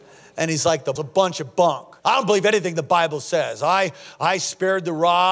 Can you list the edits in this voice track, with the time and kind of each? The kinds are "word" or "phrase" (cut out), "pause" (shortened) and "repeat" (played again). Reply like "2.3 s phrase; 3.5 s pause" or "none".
1.0 s word; 2.0 s pause

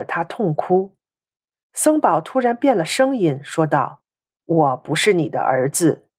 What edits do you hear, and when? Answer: 4.1 s pause

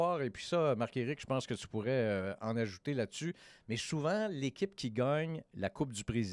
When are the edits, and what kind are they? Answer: none

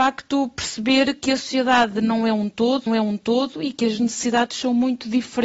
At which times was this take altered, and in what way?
2.9 s repeat

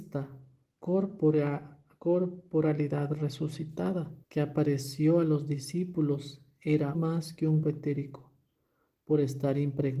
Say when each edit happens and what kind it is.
4.2 s pause; 6.9 s word; 7.6 s word

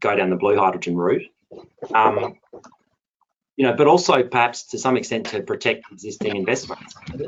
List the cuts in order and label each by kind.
none

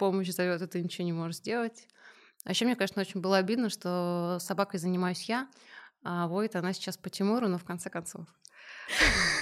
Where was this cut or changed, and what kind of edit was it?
none

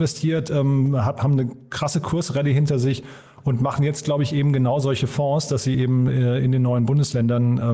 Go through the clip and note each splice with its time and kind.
none

